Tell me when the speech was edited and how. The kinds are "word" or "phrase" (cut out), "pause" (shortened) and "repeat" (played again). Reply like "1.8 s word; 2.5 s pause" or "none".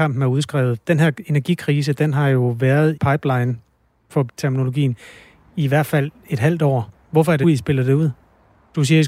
3.0 s word; 4.3 s word; 7.4 s word